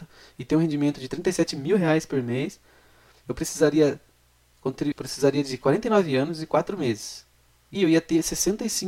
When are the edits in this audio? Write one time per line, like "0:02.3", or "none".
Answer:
0:04.9
0:07.7

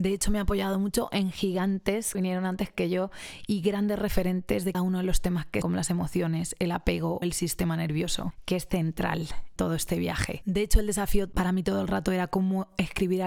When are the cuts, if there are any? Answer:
0:02.1
0:04.7
0:05.6
0:07.2
0:09.6

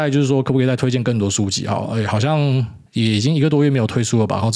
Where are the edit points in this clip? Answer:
0:02.9

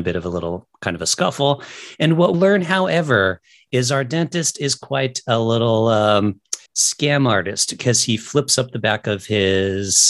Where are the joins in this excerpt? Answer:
0:02.3
0:06.7

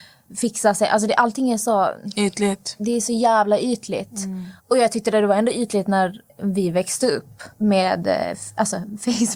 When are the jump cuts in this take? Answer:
0:04.6
0:06.3
0:07.5

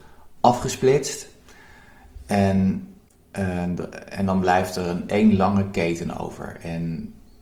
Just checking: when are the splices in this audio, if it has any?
none

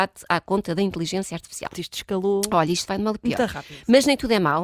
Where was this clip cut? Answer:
0:01.7

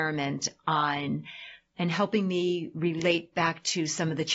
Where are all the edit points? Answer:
none

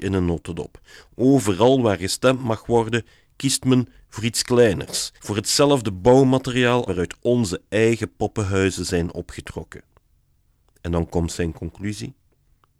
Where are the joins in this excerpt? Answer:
0:05.2
0:06.9

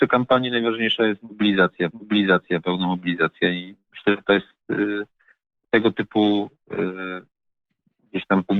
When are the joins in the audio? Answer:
0:01.9
0:05.6

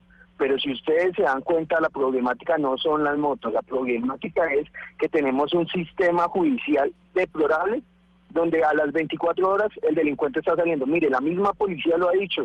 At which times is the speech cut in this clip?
none

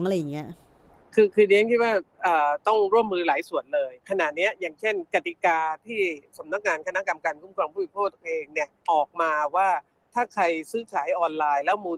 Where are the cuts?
0:04.0
0:08.8

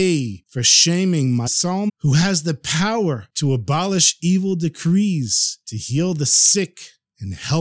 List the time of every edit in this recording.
0:01.5
0:01.9

